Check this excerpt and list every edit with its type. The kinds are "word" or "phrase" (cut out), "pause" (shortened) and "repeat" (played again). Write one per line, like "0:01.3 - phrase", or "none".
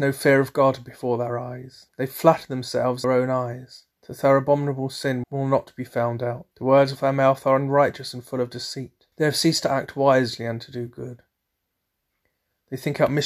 0:01.9 - pause
0:03.0 - word
0:03.9 - pause
0:05.2 - word
0:06.5 - pause
0:09.1 - pause